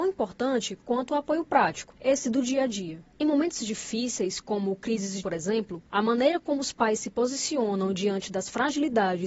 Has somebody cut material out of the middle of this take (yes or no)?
yes